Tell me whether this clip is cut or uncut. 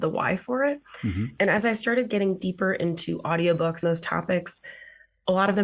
cut